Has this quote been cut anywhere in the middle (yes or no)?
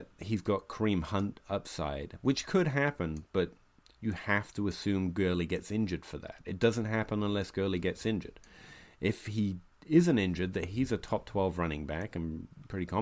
no